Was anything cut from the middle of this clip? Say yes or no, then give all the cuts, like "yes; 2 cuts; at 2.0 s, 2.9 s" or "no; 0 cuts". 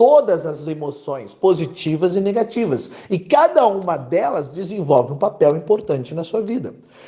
no; 0 cuts